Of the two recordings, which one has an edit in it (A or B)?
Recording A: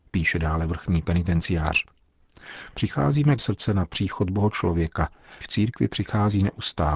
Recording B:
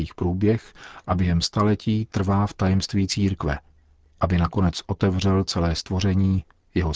A